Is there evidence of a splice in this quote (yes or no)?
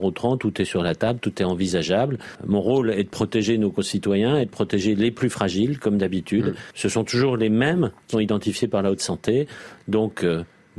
yes